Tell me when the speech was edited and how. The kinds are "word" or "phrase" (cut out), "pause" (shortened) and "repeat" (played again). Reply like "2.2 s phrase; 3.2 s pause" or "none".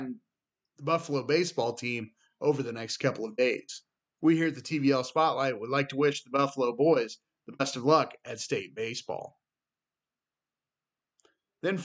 none